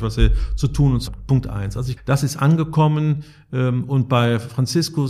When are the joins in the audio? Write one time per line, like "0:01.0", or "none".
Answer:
0:01.1
0:02.0